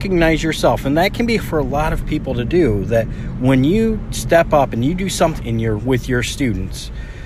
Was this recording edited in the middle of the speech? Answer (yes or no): yes